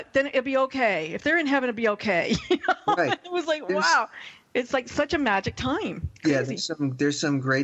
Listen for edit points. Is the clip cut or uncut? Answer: uncut